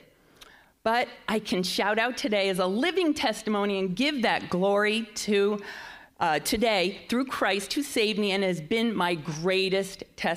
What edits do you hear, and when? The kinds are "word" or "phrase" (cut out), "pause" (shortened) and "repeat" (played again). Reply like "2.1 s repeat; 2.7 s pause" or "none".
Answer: none